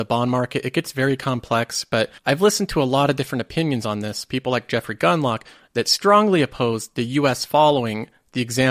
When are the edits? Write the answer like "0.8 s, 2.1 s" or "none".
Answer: 2.2 s